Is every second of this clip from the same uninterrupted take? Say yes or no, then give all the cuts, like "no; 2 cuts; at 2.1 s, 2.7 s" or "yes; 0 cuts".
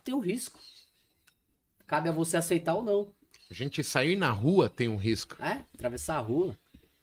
yes; 0 cuts